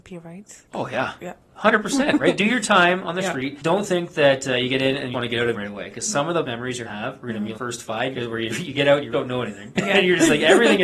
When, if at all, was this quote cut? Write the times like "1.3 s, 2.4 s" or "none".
5.1 s, 5.5 s, 6.4 s, 6.8 s, 7.5 s, 8.1 s, 9.1 s